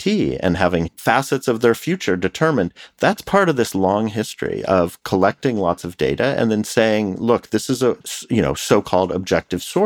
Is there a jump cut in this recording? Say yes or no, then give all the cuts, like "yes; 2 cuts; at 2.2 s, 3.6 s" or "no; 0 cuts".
no; 0 cuts